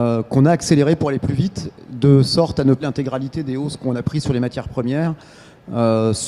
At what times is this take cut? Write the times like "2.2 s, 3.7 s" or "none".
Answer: 2.8 s